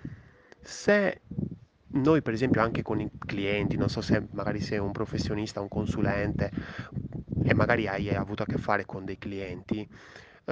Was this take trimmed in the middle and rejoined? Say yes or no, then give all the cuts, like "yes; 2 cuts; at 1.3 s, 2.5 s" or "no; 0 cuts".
no; 0 cuts